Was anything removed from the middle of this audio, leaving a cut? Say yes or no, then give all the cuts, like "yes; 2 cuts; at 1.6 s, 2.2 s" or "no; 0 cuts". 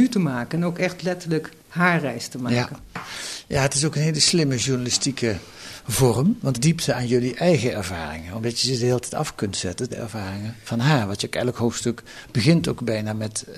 yes; 3 cuts; at 1.6 s, 6.5 s, 9.9 s